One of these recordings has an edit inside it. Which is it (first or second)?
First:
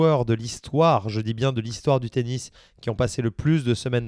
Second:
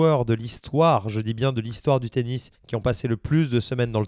second